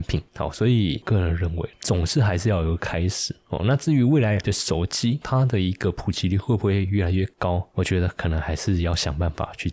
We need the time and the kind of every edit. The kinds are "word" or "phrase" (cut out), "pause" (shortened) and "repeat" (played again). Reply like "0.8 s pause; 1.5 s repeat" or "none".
4.4 s phrase